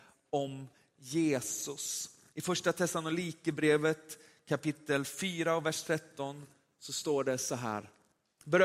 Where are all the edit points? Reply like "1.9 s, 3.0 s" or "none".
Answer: none